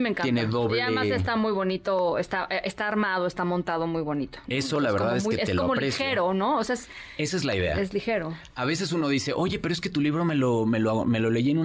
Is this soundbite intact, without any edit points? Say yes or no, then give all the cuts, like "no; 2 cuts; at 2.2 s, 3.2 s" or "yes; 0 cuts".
yes; 0 cuts